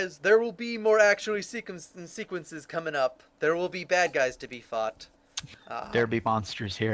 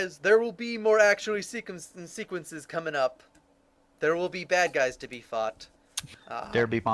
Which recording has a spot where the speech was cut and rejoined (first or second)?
first